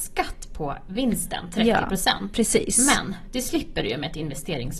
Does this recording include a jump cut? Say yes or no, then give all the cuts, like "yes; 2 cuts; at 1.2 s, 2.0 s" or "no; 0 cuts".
no; 0 cuts